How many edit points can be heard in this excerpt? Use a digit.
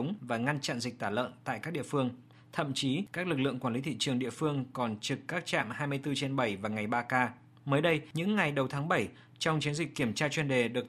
0